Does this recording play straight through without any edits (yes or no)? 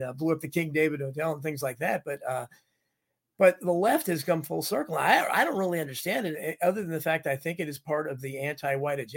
yes